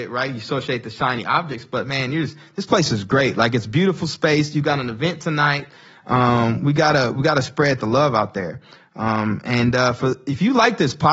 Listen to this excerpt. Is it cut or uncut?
uncut